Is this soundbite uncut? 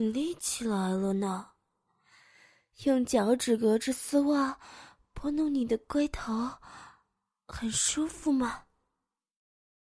yes; 0 cuts

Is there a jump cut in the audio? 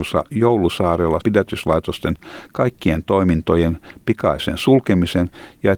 yes; 1 cut; at 1.2 s

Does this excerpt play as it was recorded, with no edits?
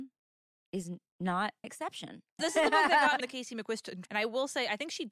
no; 4 cuts; at 1.6 s, 2.4 s, 3.2 s, 4.1 s

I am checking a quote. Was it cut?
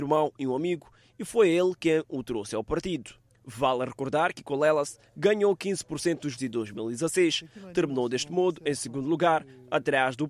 yes; 1 cut; at 6.4 s

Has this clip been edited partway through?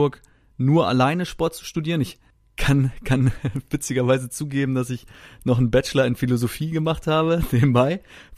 no; 0 cuts

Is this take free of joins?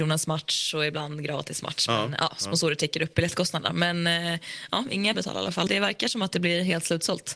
no; 2 cuts; at 5.1 s, 5.7 s

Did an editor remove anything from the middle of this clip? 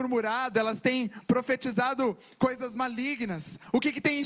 no; 0 cuts

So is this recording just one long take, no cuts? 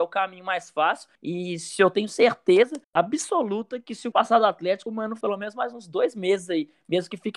no; 4 cuts; at 1.1 s, 2.8 s, 4.1 s, 5.2 s

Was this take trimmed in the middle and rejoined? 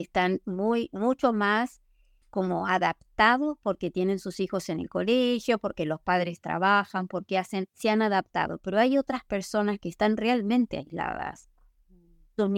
yes; 2 cuts; at 2.2 s, 7.7 s

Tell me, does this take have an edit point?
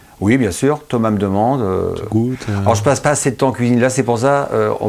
no; 0 cuts

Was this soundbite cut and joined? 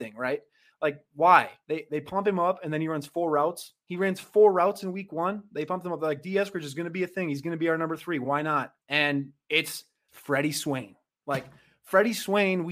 no; 0 cuts

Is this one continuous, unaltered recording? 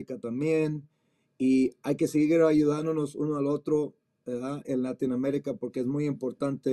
yes; 0 cuts

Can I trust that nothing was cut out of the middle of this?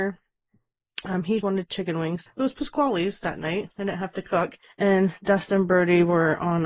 no; 3 cuts; at 1.4 s, 2.3 s, 4.6 s

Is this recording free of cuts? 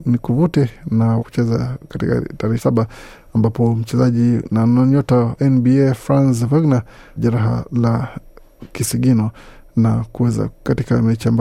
no; 4 cuts; at 1.2 s, 2.6 s, 5.4 s, 7.2 s

